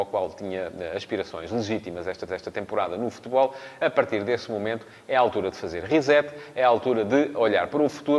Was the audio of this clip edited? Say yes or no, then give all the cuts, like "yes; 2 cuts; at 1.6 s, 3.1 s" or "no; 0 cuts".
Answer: yes; 1 cut; at 2.3 s